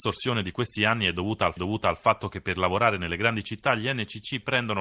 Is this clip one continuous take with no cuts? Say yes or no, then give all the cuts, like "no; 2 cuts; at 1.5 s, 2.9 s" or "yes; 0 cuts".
no; 1 cut; at 1.6 s